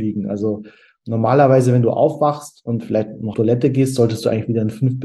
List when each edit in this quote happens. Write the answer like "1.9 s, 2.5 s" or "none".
3.3 s